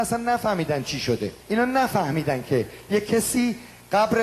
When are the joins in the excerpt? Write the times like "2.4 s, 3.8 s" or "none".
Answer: 1.4 s